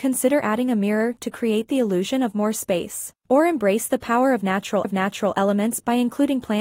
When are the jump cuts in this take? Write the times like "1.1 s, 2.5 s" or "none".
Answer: 4.8 s